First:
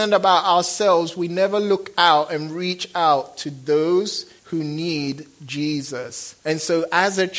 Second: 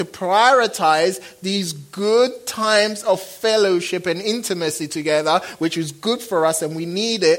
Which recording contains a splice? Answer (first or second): first